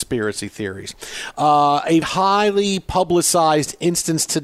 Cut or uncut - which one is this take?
cut